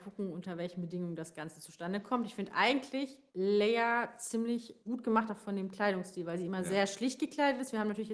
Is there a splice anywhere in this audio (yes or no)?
yes